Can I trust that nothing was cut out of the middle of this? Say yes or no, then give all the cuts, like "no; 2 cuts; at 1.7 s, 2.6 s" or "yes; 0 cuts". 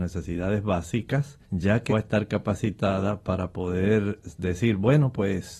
no; 2 cuts; at 1.4 s, 1.9 s